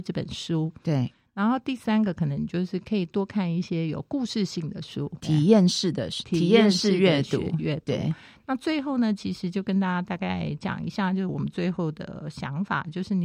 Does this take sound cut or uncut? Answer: cut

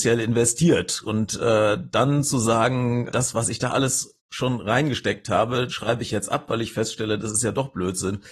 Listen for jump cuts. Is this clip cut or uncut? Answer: cut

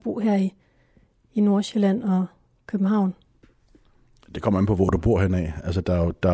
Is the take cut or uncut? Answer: uncut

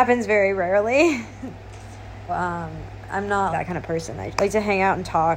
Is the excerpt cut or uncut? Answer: cut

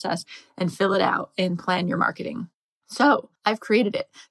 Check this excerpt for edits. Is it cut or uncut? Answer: uncut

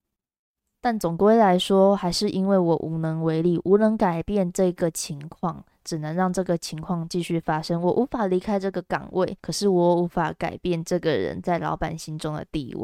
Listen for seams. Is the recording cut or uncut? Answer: cut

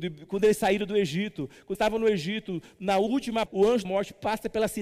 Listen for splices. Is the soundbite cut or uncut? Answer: cut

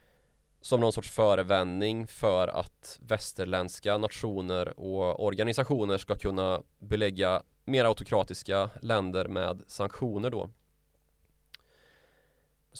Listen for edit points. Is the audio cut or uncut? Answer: uncut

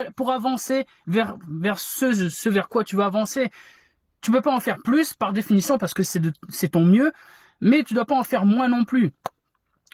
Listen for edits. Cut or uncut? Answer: uncut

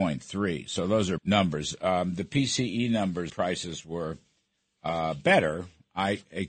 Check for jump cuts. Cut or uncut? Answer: cut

